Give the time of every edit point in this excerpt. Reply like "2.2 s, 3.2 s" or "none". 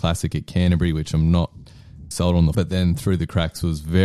2.1 s, 2.5 s